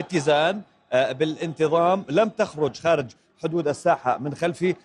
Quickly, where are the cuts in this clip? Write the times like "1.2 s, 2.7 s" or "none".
none